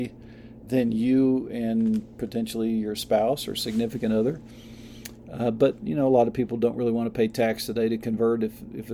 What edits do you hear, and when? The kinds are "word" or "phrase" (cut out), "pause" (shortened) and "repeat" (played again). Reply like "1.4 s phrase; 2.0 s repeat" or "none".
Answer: none